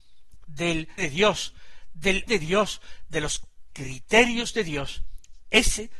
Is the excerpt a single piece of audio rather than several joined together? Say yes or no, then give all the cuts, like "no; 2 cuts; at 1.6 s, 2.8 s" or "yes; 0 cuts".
no; 2 cuts; at 1.0 s, 2.3 s